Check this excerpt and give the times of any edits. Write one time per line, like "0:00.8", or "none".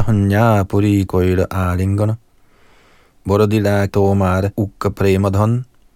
0:01.1
0:03.9
0:04.5